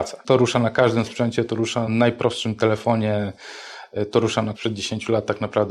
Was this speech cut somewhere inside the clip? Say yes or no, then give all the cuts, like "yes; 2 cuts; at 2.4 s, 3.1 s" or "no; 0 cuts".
yes; 2 cuts; at 1.9 s, 4.5 s